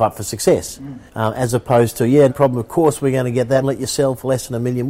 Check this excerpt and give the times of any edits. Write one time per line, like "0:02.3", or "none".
0:01.1
0:02.3
0:03.6